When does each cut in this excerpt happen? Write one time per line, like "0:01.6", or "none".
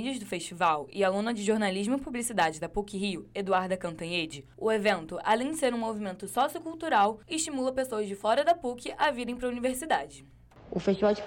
none